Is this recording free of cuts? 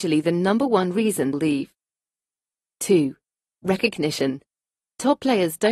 no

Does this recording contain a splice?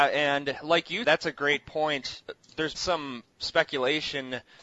yes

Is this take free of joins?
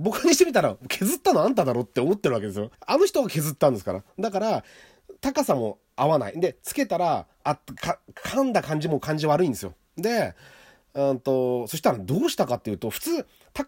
no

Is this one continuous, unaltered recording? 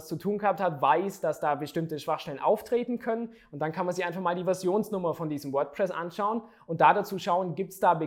yes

